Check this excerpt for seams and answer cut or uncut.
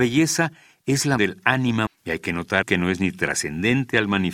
cut